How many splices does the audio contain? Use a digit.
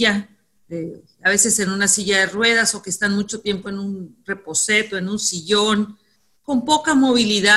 0